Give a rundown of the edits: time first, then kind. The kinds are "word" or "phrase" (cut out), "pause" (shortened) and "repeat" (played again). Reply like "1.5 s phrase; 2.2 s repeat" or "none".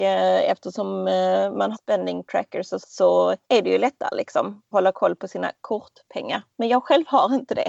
1.7 s word; 2.8 s word; 3.4 s pause; 4.7 s word; 6.5 s pause